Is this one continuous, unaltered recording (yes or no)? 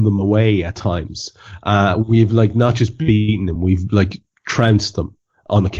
yes